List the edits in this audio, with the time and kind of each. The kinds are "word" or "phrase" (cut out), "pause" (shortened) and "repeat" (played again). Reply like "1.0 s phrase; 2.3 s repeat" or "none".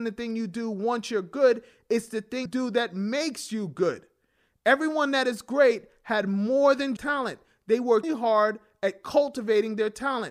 2.5 s word; 7.0 s word; 8.0 s word